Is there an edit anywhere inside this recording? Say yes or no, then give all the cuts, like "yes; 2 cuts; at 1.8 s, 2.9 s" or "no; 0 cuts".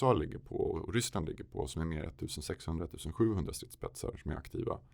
no; 0 cuts